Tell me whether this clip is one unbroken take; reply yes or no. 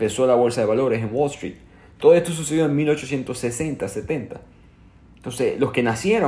yes